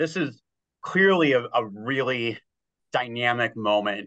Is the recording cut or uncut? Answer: uncut